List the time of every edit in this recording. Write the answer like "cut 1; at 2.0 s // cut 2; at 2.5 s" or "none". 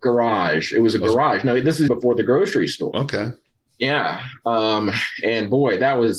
cut 1; at 1.9 s // cut 2; at 2.9 s